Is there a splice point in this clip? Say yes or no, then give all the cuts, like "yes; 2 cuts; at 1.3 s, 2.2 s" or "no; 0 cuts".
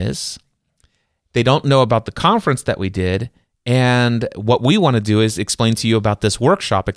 no; 0 cuts